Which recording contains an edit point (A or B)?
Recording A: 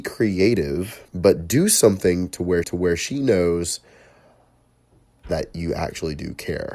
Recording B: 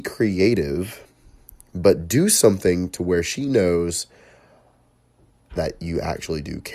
A